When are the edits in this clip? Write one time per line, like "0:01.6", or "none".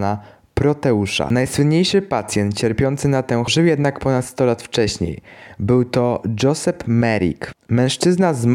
0:03.5